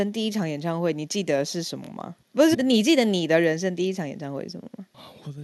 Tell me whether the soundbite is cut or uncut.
cut